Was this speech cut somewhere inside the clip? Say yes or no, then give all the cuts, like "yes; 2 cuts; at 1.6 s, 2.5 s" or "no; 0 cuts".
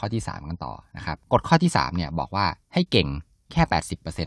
yes; 2 cuts; at 1.2 s, 2.6 s